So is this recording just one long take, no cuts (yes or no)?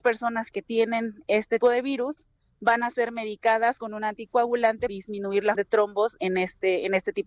no